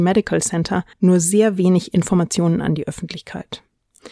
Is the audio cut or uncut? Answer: cut